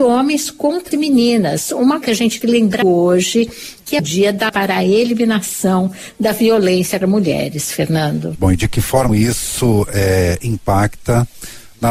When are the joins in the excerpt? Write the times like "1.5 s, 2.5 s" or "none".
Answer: 0.9 s, 2.0 s, 2.4 s, 2.8 s, 4.0 s, 4.5 s, 7.0 s, 8.3 s, 9.1 s